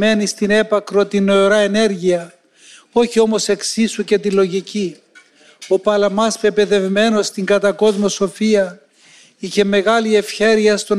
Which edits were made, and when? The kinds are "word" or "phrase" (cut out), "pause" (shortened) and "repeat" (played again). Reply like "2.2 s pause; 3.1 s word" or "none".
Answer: none